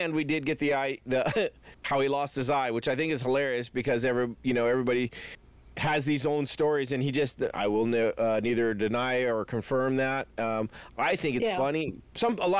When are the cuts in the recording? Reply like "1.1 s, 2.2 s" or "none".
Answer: none